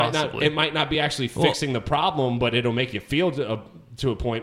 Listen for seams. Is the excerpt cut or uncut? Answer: uncut